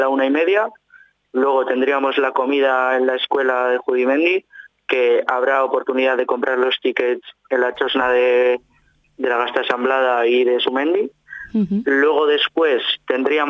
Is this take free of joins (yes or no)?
yes